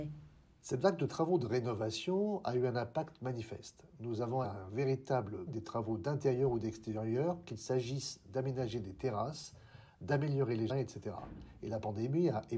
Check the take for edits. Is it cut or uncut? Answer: cut